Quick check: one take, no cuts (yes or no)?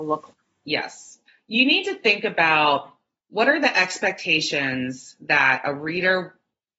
yes